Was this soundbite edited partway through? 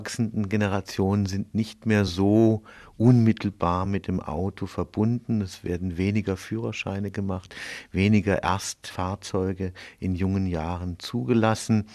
no; 0 cuts

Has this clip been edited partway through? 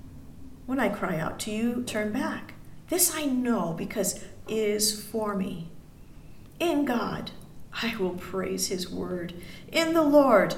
yes; 2 cuts; at 1.9 s, 4.5 s

